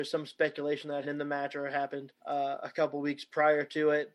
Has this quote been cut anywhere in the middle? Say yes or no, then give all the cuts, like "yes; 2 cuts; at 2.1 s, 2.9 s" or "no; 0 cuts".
yes; 2 cuts; at 1.0 s, 2.2 s